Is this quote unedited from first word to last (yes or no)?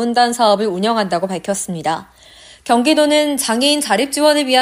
yes